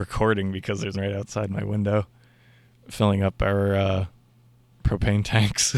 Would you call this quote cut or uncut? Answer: cut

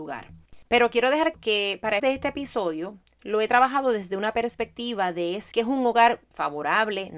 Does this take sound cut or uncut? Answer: cut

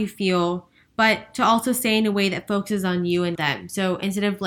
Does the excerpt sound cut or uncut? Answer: cut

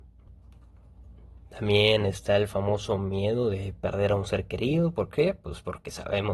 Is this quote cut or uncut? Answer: uncut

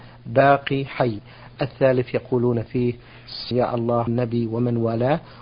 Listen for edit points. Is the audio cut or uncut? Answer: cut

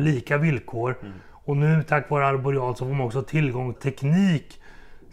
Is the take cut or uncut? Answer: cut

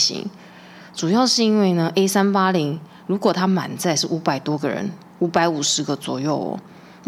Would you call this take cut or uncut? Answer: uncut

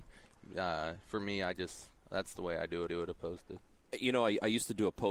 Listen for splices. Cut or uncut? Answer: cut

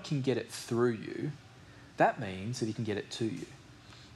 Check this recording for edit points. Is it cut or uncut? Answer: uncut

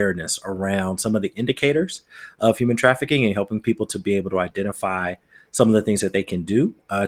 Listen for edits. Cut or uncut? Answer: uncut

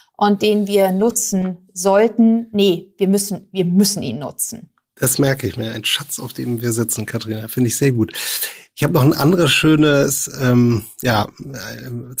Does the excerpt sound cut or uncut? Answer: uncut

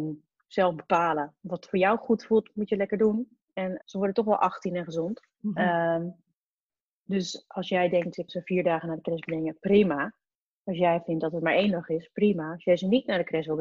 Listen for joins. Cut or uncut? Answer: cut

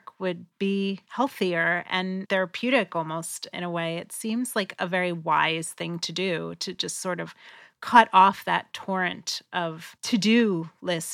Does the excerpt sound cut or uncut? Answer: uncut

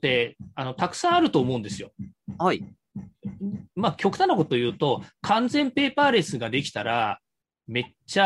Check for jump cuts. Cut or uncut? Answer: uncut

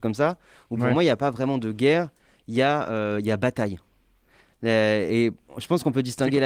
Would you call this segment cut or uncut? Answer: uncut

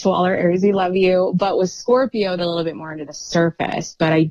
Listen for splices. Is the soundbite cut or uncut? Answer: cut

